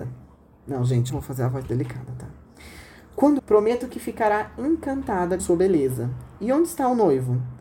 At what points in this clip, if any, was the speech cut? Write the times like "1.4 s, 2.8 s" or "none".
1.1 s, 3.4 s, 5.4 s